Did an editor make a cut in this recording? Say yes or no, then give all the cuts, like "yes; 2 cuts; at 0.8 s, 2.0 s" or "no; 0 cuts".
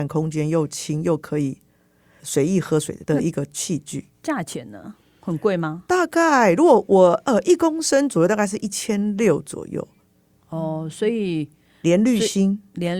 yes; 1 cut; at 2.2 s